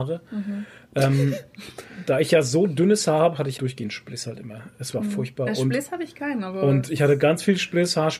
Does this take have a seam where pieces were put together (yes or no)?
yes